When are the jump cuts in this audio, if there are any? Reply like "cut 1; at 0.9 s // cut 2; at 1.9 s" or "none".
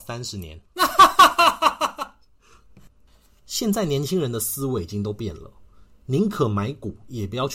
none